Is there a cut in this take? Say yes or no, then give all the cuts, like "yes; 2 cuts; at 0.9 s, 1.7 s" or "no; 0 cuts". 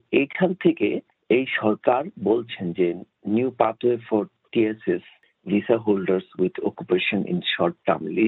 no; 0 cuts